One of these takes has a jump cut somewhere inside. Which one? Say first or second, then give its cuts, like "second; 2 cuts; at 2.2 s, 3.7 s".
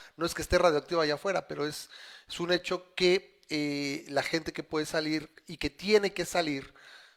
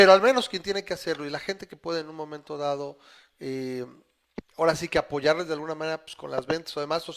second; 1 cut; at 4.5 s